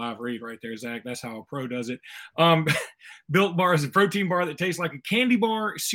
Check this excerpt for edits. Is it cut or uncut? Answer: uncut